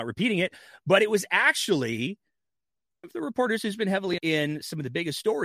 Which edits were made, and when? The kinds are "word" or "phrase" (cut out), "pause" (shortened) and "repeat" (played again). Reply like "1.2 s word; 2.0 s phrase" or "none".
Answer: 3.0 s word; 4.2 s word